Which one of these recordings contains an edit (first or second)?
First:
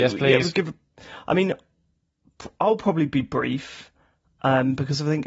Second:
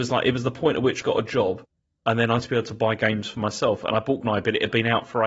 second